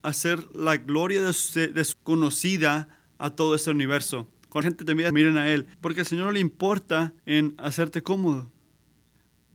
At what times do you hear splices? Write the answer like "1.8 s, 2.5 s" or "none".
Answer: 1.9 s, 4.6 s, 5.1 s, 5.7 s, 7.2 s